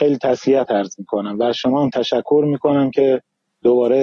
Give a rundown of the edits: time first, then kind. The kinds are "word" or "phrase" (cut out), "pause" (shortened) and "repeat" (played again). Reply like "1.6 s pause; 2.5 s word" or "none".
none